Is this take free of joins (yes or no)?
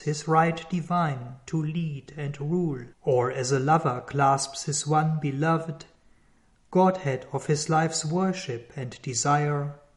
no